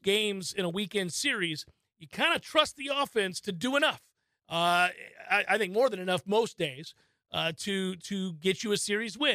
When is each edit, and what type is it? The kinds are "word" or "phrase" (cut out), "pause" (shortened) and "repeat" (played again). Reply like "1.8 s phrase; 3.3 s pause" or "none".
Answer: none